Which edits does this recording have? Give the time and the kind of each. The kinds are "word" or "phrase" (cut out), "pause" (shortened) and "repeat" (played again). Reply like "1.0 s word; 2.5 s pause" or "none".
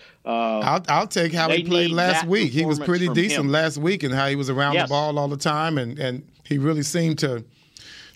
none